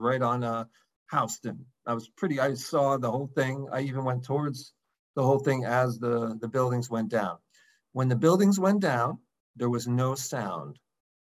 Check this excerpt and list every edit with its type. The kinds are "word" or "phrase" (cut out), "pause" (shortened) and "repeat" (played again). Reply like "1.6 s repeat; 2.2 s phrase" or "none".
none